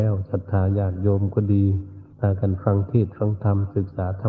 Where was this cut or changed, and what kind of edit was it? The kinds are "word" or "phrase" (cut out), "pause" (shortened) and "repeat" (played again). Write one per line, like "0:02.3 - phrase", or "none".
0:02.1 - pause

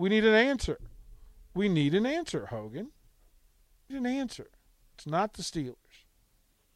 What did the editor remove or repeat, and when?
0:03.9 - word

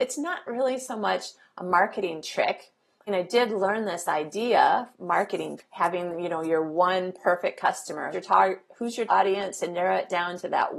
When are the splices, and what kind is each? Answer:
0:03.1 - word
0:04.9 - word
0:05.6 - word
0:08.1 - word
0:09.1 - word

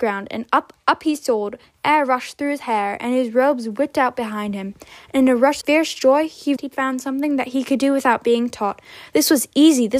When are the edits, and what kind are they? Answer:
0:05.6 - word
0:06.6 - word

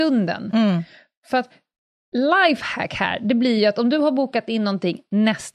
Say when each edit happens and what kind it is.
none

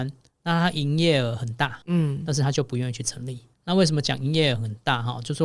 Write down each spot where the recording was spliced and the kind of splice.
0:01.8 - pause
0:03.5 - pause

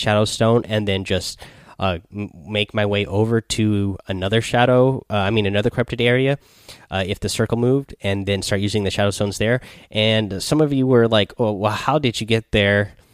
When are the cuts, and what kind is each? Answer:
none

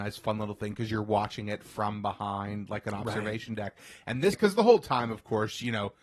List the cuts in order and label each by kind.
0:04.3 - phrase

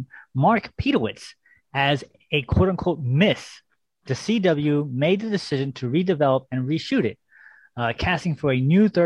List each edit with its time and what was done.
none

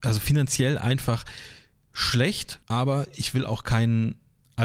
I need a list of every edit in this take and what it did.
0:02.6 - pause

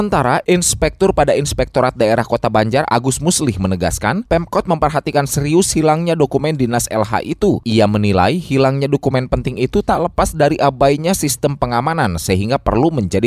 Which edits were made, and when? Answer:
none

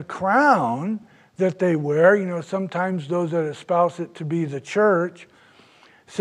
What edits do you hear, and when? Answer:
none

